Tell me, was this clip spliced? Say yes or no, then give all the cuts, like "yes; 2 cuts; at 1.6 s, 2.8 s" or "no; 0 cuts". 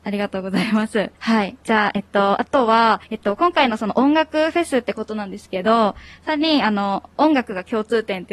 yes; 3 cuts; at 1.1 s, 1.6 s, 3.0 s